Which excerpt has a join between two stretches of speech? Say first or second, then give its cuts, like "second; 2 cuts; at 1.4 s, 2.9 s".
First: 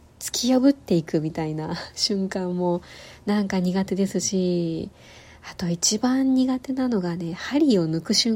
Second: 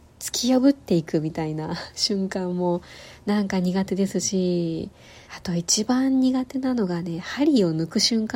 second; 1 cut; at 5.2 s